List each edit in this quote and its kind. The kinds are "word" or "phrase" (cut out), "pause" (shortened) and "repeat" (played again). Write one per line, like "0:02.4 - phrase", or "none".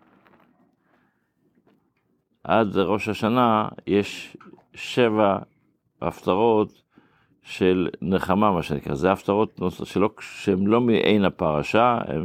none